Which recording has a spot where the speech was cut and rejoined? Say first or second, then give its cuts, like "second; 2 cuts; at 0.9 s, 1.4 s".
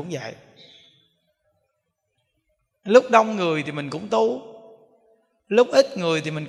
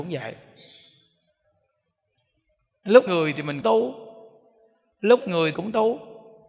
second; 4 cuts; at 3.1 s, 3.6 s, 5.2 s, 5.5 s